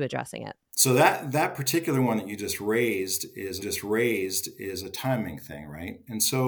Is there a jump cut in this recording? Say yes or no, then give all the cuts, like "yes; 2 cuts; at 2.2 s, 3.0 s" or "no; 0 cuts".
yes; 1 cut; at 3.6 s